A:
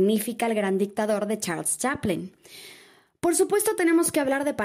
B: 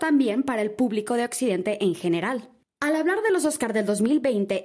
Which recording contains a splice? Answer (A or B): B